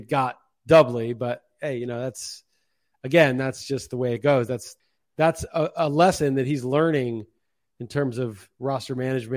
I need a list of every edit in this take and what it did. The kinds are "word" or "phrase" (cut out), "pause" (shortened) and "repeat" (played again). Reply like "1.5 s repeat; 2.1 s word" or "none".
none